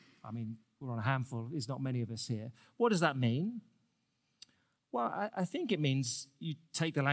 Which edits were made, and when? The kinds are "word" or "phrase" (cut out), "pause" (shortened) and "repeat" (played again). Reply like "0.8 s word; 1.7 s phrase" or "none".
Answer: none